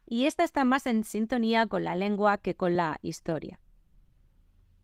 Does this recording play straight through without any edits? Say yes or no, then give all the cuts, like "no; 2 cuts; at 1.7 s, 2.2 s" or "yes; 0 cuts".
yes; 0 cuts